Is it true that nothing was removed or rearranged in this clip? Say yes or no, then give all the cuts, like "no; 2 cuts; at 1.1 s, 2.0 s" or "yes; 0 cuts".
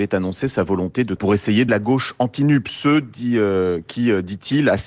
no; 2 cuts; at 1.2 s, 1.7 s